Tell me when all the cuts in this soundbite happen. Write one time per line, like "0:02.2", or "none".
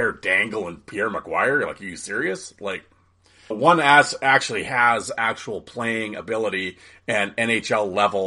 0:03.5